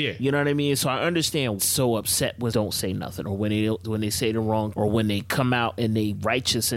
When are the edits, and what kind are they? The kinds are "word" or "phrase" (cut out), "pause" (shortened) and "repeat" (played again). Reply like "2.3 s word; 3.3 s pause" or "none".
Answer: 1.6 s phrase; 2.5 s word; 4.7 s word